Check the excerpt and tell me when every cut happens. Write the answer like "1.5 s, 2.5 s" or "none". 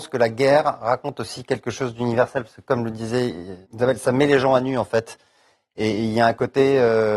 3.6 s